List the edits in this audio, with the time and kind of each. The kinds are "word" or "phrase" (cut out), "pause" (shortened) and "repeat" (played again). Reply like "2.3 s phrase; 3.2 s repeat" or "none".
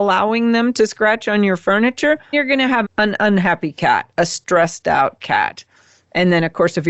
2.3 s word; 2.8 s word